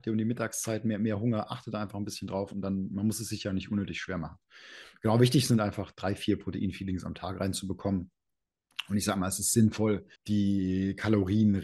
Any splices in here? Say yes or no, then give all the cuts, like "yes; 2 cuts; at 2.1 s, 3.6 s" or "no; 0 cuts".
yes; 1 cut; at 10.2 s